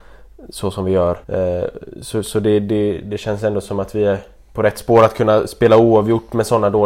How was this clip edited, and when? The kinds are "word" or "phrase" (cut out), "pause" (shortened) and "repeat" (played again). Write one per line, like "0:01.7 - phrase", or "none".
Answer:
0:01.2 - pause

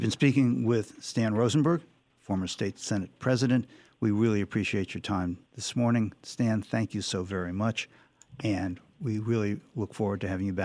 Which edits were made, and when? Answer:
0:05.5 - pause

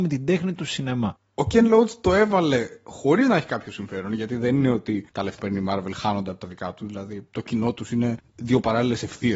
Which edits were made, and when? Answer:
0:05.4 - word

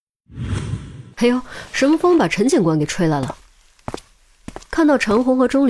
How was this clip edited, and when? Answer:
0:01.1 - pause

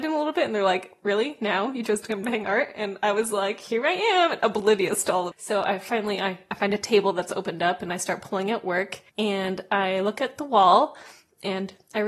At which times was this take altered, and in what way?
0:02.2 - word
0:05.3 - word
0:09.1 - pause

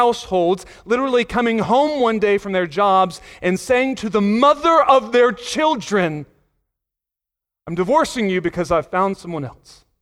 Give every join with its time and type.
none

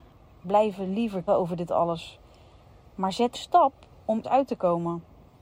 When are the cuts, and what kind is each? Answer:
0:01.3 - word
0:03.3 - word
0:04.2 - word

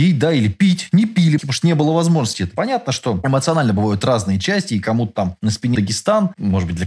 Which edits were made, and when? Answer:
0:01.4 - word
0:05.7 - word

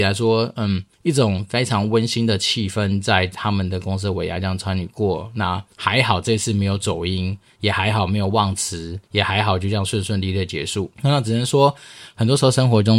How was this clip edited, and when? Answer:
0:00.9 - pause
0:05.7 - pause
0:09.1 - pause
0:10.9 - pause

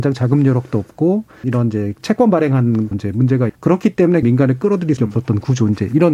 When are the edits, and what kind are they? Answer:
0:01.4 - word
0:01.9 - word
0:02.9 - word
0:03.5 - word
0:04.2 - word
0:05.0 - word

